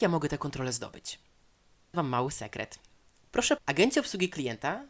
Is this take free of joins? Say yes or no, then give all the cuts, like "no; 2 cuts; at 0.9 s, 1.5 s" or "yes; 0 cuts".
no; 2 cuts; at 1.9 s, 3.6 s